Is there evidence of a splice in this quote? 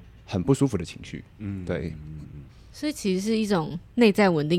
yes; 1 cut; at 2.5 s

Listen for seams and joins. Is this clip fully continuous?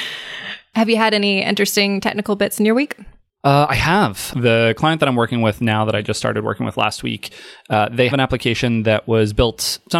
no; 1 cut; at 8.1 s

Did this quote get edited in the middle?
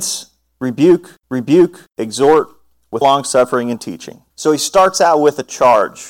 yes; 3 cuts; at 1.2 s, 3.0 s, 4.3 s

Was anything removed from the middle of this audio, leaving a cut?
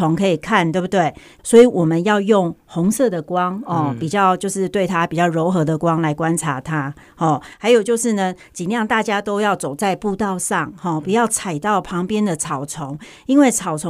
no; 0 cuts

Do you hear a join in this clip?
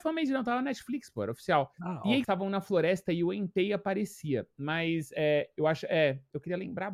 yes; 2 cuts; at 1.7 s, 2.2 s

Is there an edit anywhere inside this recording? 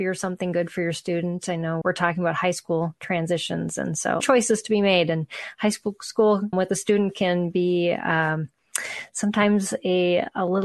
yes; 3 cuts; at 1.8 s, 4.2 s, 6.5 s

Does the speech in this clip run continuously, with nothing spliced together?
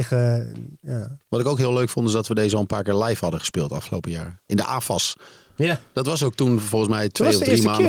yes; 0 cuts

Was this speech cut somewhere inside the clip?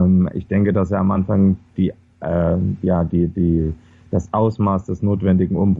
no; 0 cuts

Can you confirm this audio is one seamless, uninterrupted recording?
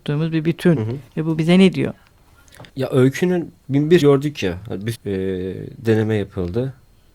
no; 5 cuts; at 1.1 s, 1.4 s, 2.7 s, 4.0 s, 4.9 s

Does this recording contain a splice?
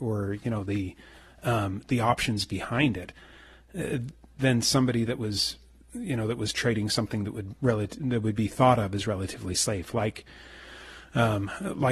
no; 0 cuts

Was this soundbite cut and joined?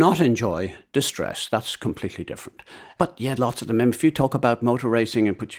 yes; 1 cut; at 3.4 s

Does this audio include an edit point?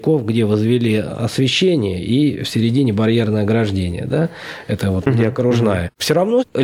no; 0 cuts

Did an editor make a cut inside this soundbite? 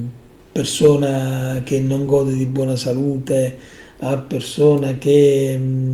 no; 0 cuts

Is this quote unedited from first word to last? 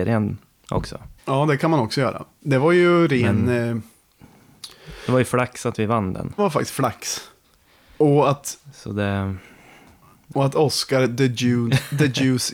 no; 3 cuts; at 1.2 s, 6.4 s, 10.3 s

